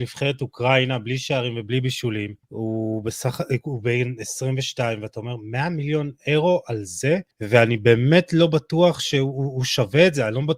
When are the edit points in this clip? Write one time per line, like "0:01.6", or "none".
0:02.4
0:07.3